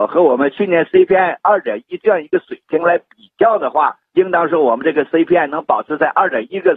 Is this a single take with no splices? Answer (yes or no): yes